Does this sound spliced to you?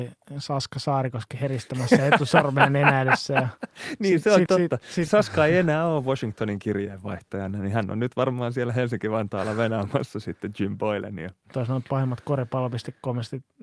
yes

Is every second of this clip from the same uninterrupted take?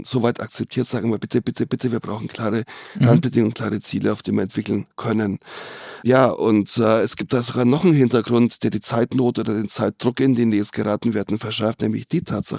yes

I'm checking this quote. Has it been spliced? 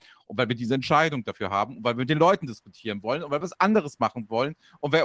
no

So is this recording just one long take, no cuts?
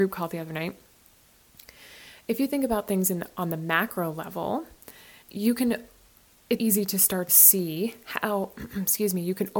no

